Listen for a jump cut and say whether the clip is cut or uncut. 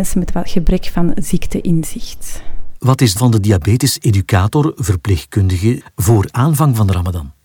cut